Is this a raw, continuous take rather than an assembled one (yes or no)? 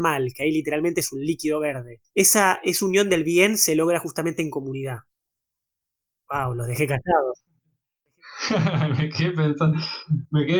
no